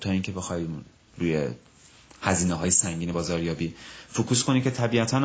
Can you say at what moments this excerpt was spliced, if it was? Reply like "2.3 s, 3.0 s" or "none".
none